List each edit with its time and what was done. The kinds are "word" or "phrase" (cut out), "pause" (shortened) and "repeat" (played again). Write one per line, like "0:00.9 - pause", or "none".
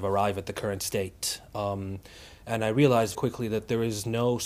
0:03.1 - word